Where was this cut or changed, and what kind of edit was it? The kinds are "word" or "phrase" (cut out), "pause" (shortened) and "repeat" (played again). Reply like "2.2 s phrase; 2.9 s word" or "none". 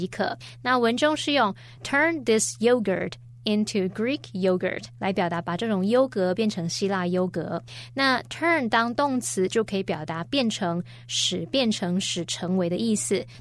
none